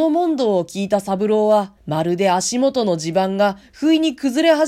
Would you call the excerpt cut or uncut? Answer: cut